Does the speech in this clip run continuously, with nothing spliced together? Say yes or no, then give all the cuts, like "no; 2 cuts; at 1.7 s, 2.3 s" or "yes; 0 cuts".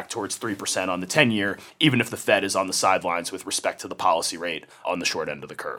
yes; 0 cuts